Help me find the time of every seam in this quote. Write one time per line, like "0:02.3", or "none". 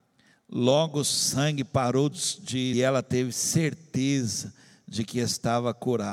0:02.7